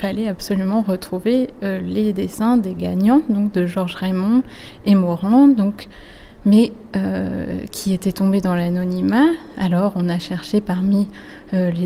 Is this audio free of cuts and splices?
yes; 0 cuts

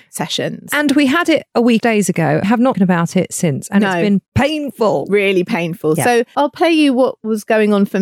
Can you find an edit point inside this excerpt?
yes; 5 cuts; at 1.8 s, 2.4 s, 2.7 s, 4.3 s, 6.3 s

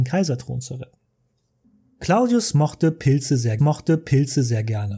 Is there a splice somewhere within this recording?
yes; 1 cut; at 3.6 s

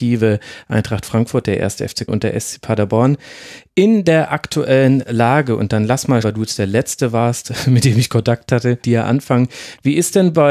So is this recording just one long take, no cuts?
no; 3 cuts; at 2.1 s, 6.2 s, 8.8 s

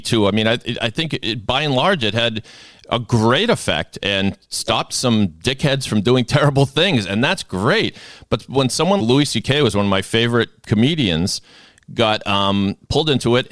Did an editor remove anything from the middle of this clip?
yes; 1 cut; at 9.0 s

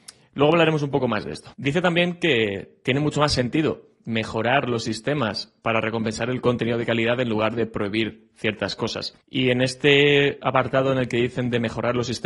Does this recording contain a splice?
yes; 2 cuts; at 1.5 s, 9.2 s

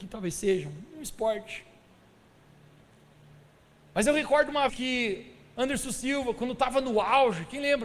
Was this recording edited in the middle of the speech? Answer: yes; 1 cut; at 4.7 s

